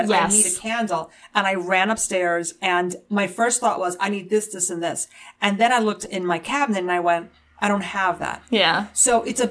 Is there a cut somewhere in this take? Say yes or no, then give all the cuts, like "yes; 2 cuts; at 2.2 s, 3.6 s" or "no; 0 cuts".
no; 0 cuts